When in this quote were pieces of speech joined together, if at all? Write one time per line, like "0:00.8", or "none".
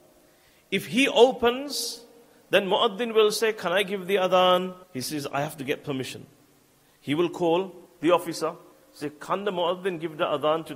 0:04.8
0:07.9
0:08.7